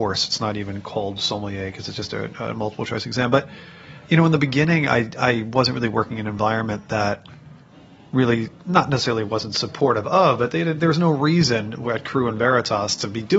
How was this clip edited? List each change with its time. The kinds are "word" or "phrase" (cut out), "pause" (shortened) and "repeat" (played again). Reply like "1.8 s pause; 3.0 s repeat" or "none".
none